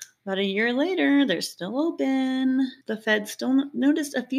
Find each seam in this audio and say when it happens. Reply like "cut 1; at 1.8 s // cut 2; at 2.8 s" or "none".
cut 1; at 2.8 s